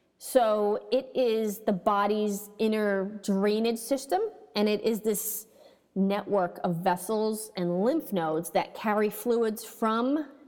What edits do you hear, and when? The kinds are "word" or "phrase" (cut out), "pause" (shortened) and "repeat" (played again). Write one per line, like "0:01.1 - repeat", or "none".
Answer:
none